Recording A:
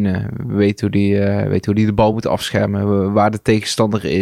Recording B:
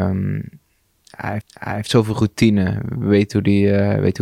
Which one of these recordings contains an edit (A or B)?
B